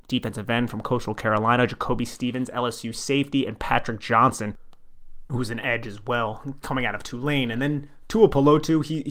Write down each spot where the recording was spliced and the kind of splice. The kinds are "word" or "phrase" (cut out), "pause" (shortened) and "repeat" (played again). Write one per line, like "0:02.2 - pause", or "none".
none